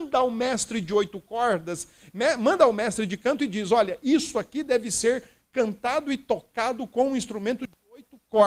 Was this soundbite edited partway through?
no; 0 cuts

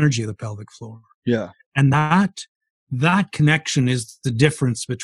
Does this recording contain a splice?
no; 0 cuts

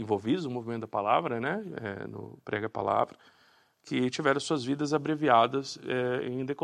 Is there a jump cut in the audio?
no; 0 cuts

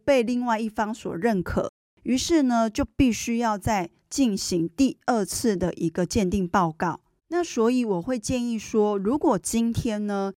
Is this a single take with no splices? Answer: yes; 0 cuts

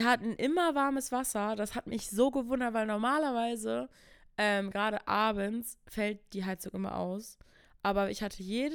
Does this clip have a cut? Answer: no; 0 cuts

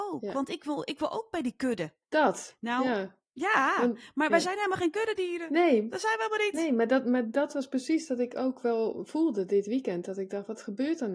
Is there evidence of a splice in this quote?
no; 0 cuts

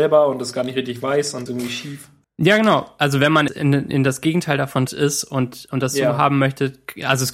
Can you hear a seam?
yes; 4 cuts; at 1.5 s, 2.2 s, 3.5 s, 4.9 s

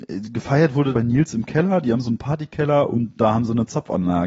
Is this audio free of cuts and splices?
no; 1 cut; at 0.9 s

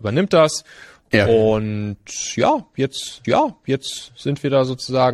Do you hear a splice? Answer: yes; 1 cut; at 3.2 s

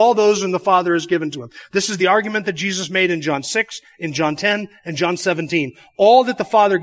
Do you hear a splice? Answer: no; 0 cuts

